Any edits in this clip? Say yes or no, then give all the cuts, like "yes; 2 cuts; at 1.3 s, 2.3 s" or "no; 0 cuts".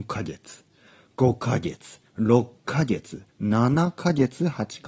yes; 2 cuts; at 2.1 s, 3.3 s